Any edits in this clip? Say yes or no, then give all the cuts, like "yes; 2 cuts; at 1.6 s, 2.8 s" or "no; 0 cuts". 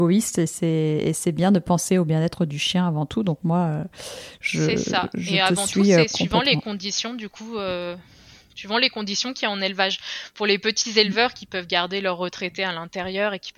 no; 0 cuts